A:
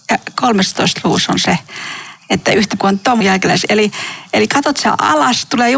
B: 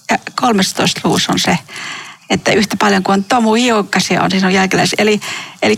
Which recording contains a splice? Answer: A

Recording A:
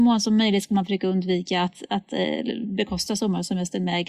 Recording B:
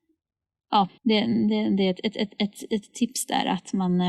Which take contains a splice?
B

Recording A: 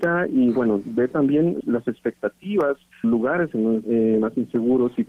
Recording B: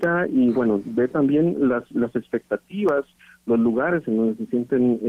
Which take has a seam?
A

